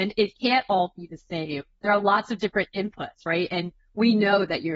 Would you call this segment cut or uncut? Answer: uncut